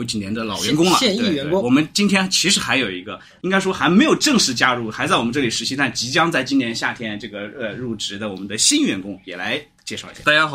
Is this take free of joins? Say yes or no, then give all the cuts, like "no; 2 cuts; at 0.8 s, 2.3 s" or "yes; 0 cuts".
no; 1 cut; at 3.4 s